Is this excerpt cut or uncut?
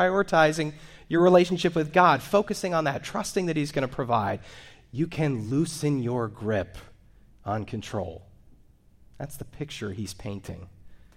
uncut